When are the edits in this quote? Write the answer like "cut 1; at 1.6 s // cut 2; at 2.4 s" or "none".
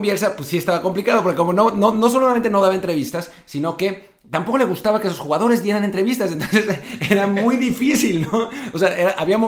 none